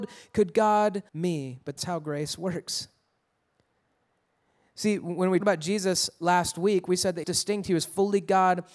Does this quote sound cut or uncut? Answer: cut